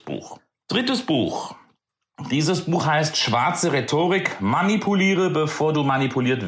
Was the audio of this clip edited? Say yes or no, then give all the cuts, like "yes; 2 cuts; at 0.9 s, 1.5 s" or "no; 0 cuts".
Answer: no; 0 cuts